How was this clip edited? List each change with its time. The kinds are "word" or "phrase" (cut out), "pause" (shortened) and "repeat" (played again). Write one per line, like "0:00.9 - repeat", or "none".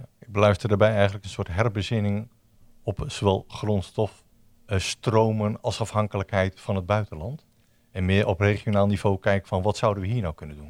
none